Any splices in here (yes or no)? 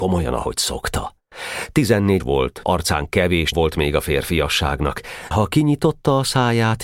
yes